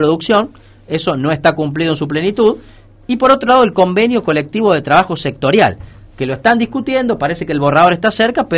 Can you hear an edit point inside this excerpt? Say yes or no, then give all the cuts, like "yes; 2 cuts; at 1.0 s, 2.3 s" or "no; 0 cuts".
no; 0 cuts